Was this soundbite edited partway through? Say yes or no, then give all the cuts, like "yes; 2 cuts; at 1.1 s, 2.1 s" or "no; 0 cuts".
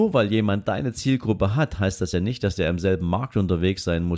no; 0 cuts